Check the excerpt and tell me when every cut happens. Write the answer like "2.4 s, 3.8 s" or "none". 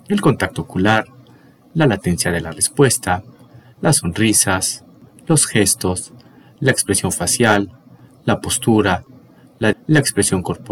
9.7 s